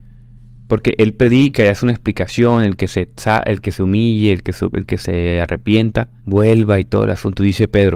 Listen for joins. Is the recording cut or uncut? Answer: cut